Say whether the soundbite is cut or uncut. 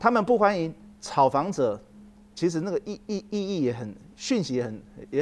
uncut